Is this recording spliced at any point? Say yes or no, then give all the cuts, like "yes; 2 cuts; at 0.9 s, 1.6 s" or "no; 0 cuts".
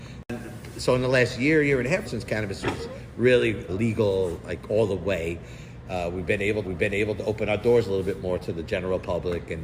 yes; 3 cuts; at 2.0 s, 3.7 s, 6.6 s